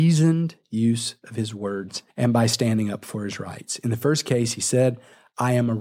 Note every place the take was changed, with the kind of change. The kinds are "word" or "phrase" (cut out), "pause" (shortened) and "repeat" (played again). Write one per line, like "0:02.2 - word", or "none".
0:02.1 - pause

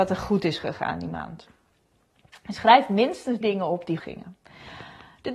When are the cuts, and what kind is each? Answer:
0:03.4 - word
0:04.0 - word

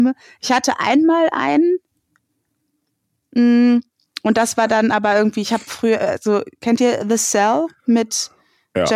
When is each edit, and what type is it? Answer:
none

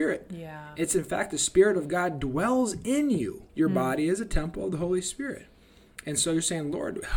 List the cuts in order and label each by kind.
0:03.5 - pause

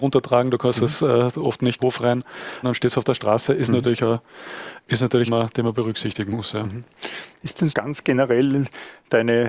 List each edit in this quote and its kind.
0:01.8 - phrase
0:02.6 - word
0:05.3 - phrase
0:07.7 - word

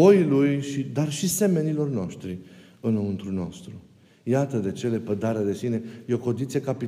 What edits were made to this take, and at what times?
none

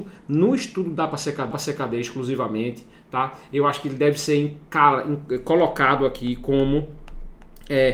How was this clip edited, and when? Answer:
0:01.5 - repeat

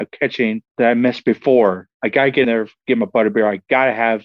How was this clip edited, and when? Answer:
0:02.4 - word

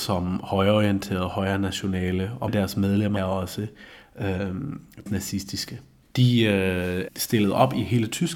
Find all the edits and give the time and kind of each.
0:02.5 - word
0:03.2 - word
0:05.1 - word
0:07.1 - word

